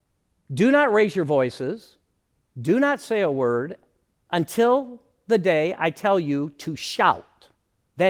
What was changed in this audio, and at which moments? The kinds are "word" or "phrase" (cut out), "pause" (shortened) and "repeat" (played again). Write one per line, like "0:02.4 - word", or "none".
none